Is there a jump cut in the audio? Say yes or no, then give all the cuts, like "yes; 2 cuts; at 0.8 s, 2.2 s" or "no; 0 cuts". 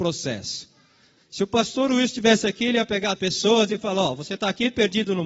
yes; 1 cut; at 3.2 s